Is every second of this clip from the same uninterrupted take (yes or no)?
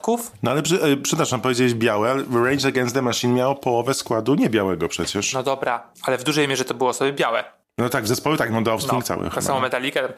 yes